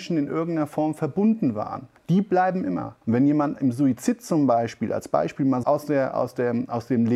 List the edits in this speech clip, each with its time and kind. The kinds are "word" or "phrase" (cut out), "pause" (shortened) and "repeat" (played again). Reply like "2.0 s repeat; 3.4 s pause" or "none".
2.0 s pause; 3.0 s pause; 5.6 s word